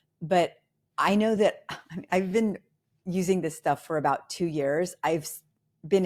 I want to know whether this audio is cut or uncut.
uncut